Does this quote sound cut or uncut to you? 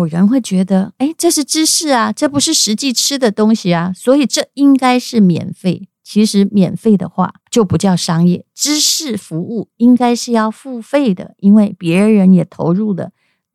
cut